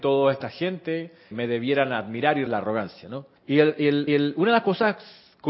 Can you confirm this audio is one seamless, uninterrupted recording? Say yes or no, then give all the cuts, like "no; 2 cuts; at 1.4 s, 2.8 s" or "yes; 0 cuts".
no; 4 cuts; at 1.3 s, 2.5 s, 3.4 s, 4.1 s